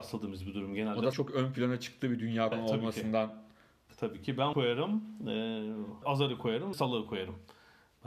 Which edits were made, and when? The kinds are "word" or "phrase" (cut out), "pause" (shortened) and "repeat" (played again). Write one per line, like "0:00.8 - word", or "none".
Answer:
0:01.1 - word
0:02.5 - word
0:04.5 - word
0:06.0 - word
0:06.7 - word